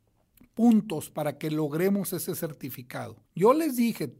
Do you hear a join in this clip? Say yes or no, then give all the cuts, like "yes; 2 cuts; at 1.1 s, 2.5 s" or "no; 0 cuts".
yes; 1 cut; at 3.3 s